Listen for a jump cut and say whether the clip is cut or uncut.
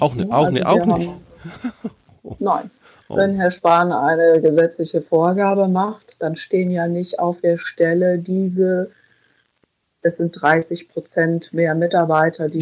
uncut